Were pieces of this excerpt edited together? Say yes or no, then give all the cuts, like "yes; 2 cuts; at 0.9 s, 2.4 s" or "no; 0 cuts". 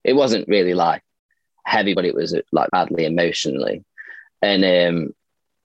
yes; 2 cuts; at 1.9 s, 2.7 s